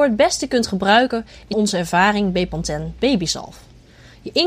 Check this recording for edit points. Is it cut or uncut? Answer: cut